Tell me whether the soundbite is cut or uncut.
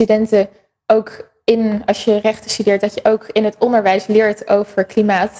uncut